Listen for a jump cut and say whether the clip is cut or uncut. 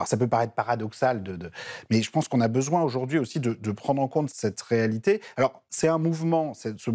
cut